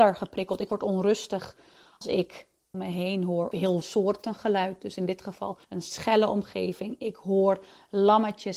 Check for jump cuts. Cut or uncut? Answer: cut